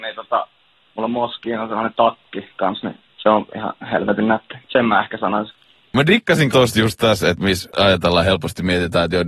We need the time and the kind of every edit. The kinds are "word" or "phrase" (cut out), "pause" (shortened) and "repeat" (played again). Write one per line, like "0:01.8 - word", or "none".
0:03.1 - pause
0:04.6 - pause
0:06.5 - word